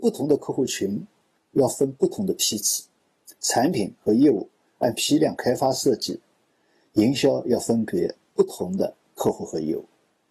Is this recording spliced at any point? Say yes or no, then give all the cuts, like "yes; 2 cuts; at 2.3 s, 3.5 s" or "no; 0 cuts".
no; 0 cuts